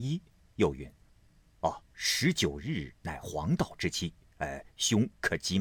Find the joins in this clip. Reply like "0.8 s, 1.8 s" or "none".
1.0 s, 1.8 s